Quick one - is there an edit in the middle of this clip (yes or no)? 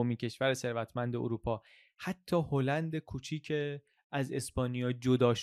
no